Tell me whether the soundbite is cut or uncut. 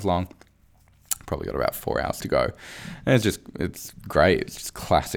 uncut